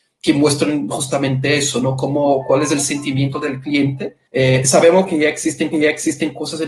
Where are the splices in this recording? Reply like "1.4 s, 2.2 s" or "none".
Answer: 4.3 s, 5.7 s